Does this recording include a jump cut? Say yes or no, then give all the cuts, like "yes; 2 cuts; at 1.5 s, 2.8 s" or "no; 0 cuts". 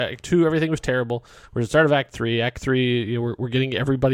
no; 0 cuts